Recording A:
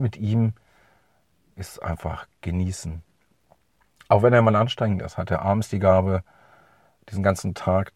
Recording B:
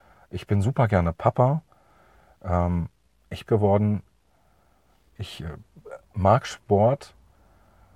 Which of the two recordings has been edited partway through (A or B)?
B